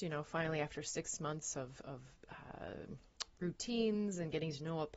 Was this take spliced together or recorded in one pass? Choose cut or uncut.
uncut